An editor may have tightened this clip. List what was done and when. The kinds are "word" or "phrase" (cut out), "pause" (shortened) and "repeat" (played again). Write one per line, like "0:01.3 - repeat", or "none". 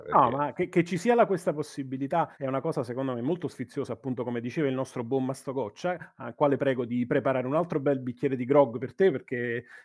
0:02.3 - pause